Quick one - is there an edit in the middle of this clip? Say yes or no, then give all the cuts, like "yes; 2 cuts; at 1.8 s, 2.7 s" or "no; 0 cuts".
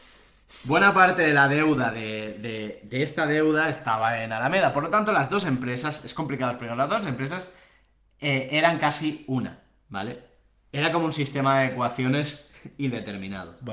no; 0 cuts